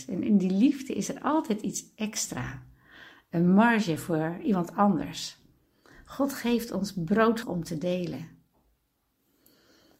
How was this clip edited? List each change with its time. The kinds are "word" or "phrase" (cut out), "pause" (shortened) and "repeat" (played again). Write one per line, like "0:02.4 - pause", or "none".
0:07.4 - word